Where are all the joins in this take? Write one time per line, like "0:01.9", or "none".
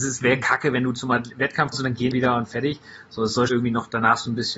0:01.7
0:02.1
0:03.5